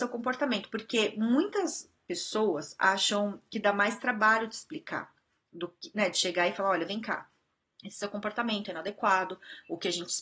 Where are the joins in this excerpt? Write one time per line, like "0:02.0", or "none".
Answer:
none